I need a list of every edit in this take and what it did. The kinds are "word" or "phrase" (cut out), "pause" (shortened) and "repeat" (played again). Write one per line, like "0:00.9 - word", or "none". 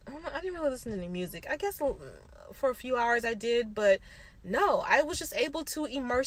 none